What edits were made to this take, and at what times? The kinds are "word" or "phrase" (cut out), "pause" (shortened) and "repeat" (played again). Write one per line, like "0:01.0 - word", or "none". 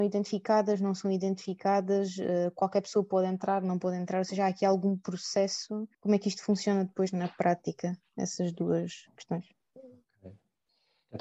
0:05.9 - pause
0:09.5 - pause